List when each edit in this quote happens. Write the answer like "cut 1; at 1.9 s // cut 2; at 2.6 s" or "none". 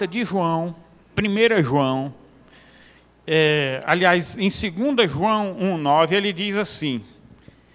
cut 1; at 1.1 s